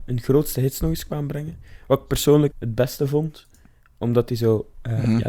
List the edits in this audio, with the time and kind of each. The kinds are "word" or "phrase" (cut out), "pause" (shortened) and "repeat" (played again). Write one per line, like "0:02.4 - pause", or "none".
0:02.5 - word